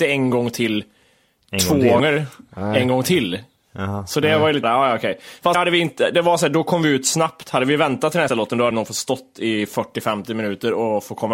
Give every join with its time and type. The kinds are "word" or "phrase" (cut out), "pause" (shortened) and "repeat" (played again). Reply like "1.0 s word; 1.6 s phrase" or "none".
2.0 s word; 4.6 s word; 5.5 s word; 8.3 s word; 8.7 s word